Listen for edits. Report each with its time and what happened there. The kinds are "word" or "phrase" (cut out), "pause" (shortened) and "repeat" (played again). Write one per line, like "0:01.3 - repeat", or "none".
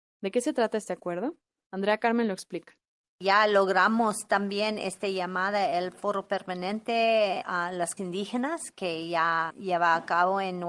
0:08.0 - word